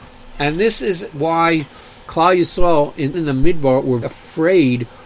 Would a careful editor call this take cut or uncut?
cut